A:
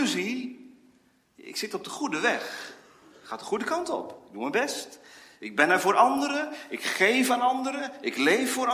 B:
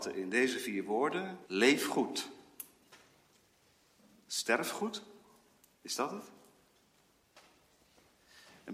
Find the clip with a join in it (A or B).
B